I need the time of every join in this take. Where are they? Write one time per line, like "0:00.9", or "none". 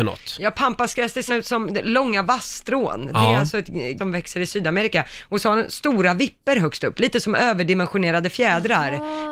0:01.3
0:04.0